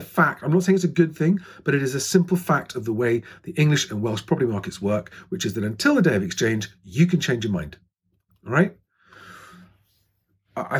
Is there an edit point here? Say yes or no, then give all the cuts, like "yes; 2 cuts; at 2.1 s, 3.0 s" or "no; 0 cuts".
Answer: no; 0 cuts